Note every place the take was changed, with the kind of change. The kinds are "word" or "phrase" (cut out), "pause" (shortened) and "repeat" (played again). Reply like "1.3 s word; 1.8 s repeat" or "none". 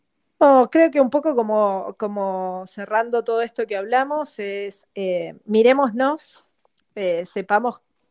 none